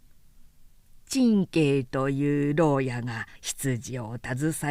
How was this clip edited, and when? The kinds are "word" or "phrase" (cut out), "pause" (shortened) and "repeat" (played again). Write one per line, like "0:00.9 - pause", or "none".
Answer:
0:03.4 - pause